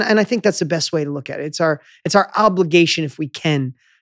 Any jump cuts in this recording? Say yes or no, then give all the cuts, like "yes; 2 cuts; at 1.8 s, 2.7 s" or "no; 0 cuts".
no; 0 cuts